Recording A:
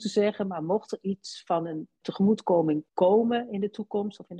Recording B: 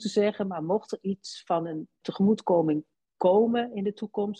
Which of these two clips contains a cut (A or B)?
A